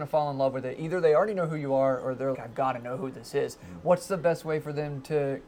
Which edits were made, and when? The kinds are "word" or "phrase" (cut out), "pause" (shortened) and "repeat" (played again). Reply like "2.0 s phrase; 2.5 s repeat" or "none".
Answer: 2.3 s word